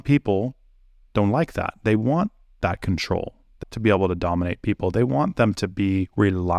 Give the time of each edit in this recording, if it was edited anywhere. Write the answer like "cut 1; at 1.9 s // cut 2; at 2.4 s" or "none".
cut 1; at 3.6 s